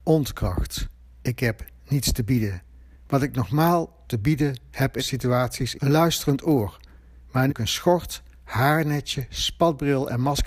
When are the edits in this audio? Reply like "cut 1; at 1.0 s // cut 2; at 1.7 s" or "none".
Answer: cut 1; at 3.0 s // cut 2; at 4.1 s // cut 3; at 5.0 s // cut 4; at 5.7 s // cut 5; at 7.5 s